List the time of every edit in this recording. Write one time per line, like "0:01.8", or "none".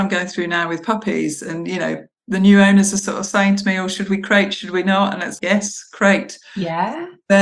0:05.4